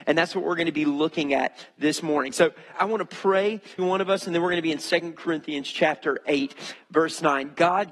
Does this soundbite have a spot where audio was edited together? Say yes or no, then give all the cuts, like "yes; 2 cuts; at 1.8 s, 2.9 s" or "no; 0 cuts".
yes; 2 cuts; at 2.7 s, 3.8 s